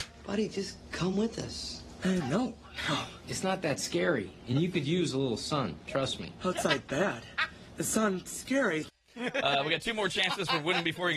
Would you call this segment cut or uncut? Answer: uncut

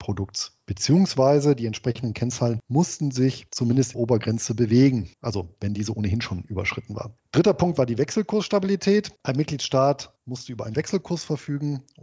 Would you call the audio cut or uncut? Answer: cut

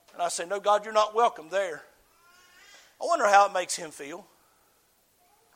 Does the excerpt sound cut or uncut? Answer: uncut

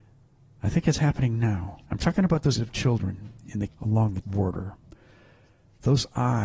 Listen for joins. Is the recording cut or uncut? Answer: cut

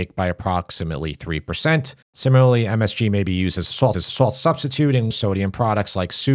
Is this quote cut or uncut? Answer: cut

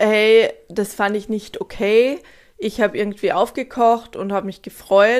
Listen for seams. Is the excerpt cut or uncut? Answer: uncut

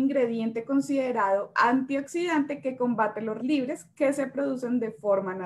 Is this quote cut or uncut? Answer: cut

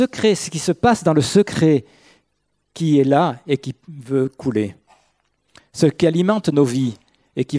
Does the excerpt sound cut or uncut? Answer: uncut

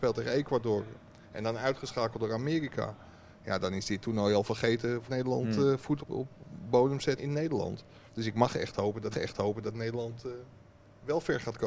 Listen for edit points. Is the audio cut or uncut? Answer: cut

